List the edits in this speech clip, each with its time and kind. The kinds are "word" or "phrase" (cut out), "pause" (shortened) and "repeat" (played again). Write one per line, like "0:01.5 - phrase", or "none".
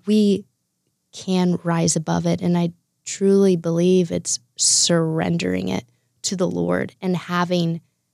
none